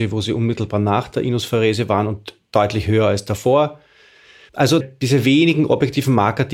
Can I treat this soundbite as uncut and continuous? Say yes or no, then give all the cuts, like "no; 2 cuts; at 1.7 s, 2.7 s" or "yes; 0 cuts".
no; 1 cut; at 4.8 s